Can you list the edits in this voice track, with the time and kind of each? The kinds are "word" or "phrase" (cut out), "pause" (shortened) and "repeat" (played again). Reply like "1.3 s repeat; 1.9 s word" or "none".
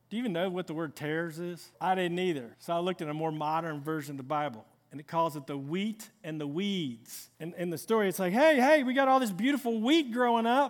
1.7 s pause; 2.5 s pause; 7.3 s pause